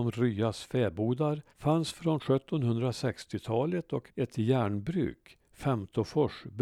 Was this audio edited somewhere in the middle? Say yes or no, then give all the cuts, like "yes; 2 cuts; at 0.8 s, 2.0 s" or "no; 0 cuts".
yes; 2 cuts; at 1.5 s, 4.1 s